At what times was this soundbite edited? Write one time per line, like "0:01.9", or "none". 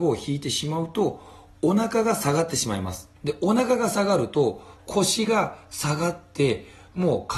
0:03.2